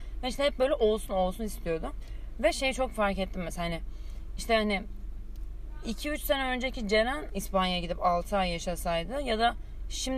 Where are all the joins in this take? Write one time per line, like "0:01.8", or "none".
0:01.1
0:07.3